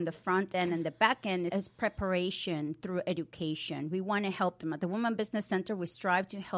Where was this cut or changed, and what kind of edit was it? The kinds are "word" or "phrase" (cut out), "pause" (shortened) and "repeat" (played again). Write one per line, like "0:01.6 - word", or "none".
0:01.5 - word